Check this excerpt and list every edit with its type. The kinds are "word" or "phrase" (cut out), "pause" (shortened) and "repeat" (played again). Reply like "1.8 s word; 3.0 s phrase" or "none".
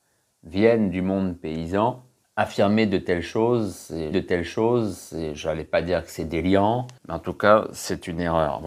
4.1 s repeat; 7.0 s pause